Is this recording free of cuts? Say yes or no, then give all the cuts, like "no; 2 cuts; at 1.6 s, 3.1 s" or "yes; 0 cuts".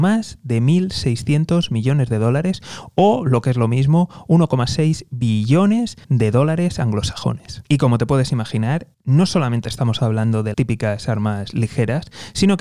no; 3 cuts; at 6.0 s, 8.9 s, 10.5 s